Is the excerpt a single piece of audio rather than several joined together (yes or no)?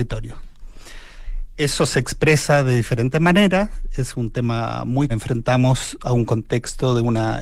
no